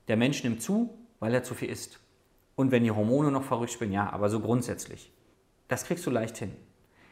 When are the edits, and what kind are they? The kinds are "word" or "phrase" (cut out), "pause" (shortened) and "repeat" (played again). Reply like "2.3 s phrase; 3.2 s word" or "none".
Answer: none